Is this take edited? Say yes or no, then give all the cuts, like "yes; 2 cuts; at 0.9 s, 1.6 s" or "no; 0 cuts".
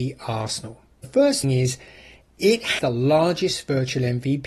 yes; 3 cuts; at 1.0 s, 1.4 s, 2.8 s